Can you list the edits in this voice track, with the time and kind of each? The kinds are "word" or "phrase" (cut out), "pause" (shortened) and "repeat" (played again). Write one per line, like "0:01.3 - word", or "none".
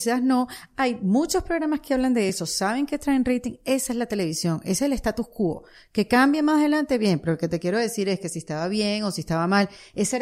none